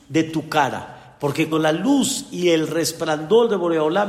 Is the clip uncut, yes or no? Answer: no